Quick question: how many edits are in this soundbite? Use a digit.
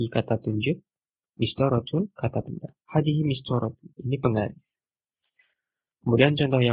2